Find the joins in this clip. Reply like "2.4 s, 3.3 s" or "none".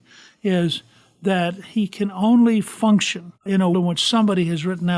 3.4 s, 3.7 s

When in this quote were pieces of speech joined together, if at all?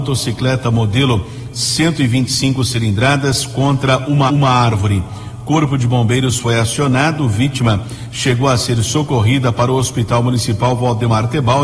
4.3 s

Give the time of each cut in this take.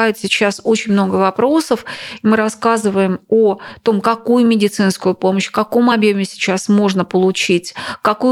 none

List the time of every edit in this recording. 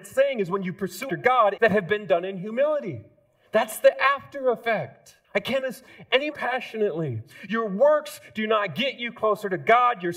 1.1 s, 1.6 s, 3.3 s, 5.2 s, 5.6 s, 6.3 s

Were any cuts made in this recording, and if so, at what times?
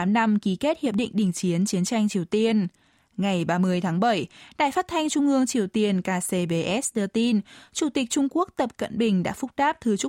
none

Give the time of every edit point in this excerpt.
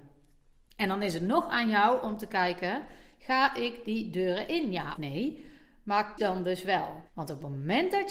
5.0 s, 6.2 s, 7.1 s

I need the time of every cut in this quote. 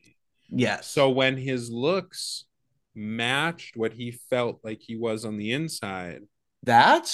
none

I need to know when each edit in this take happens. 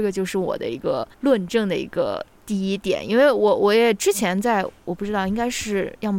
1.1 s

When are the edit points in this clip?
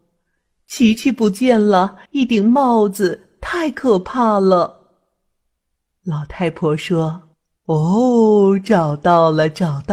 2.0 s, 7.3 s

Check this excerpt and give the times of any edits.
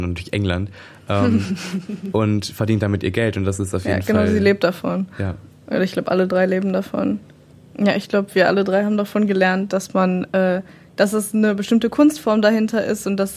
none

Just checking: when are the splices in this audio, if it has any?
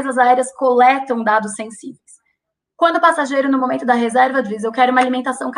none

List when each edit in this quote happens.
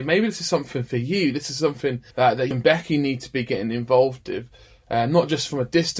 2.1 s, 2.5 s

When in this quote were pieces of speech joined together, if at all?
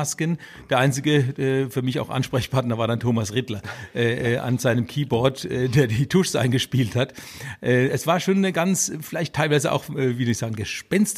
none

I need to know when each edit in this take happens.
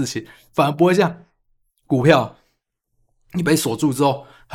none

